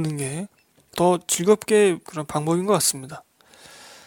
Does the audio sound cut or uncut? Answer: cut